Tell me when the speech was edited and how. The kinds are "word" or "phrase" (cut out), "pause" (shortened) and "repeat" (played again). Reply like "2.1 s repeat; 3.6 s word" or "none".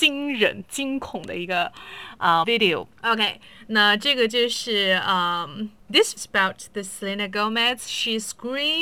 2.4 s word; 2.9 s pause; 6.2 s word